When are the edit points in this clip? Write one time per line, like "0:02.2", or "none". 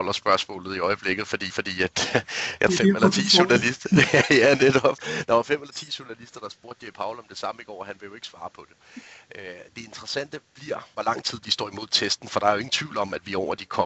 0:01.5
0:02.7
0:09.7